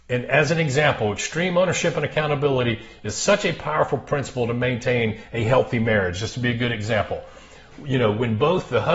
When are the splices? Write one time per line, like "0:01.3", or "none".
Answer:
none